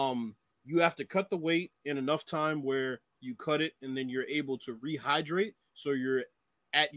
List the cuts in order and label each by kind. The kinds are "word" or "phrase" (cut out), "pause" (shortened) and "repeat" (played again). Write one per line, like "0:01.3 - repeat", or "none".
none